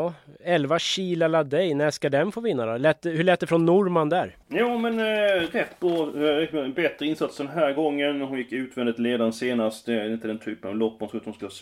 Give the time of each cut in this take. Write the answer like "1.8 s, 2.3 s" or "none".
4.4 s